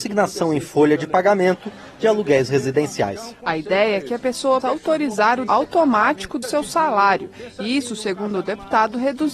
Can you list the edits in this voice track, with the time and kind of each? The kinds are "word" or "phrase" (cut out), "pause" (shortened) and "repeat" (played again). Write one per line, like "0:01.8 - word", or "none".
0:04.6 - word
0:05.5 - word
0:06.4 - phrase